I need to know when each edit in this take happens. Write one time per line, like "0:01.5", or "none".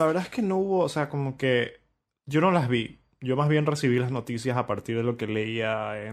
none